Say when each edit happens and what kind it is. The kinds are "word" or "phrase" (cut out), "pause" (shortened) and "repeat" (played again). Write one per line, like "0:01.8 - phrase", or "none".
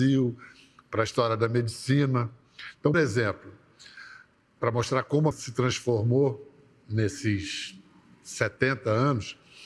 0:02.9 - word
0:05.3 - word